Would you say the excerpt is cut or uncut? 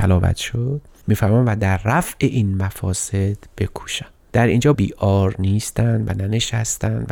cut